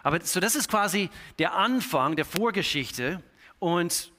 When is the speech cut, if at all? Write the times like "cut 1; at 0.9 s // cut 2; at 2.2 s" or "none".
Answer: none